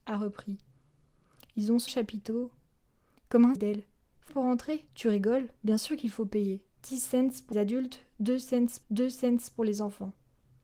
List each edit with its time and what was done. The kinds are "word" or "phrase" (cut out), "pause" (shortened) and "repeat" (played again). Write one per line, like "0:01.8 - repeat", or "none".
0:01.9 - word
0:03.6 - phrase
0:04.3 - word
0:04.9 - pause
0:05.6 - pause
0:06.7 - pause
0:07.5 - word
0:08.8 - repeat